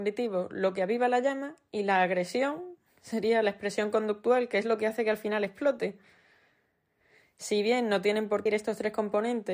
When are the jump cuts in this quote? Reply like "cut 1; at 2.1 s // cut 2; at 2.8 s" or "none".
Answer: cut 1; at 8.5 s